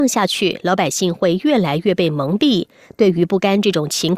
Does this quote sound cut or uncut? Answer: uncut